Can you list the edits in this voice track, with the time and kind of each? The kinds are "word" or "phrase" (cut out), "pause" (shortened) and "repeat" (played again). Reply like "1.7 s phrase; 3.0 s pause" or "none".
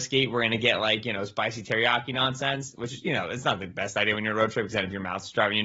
none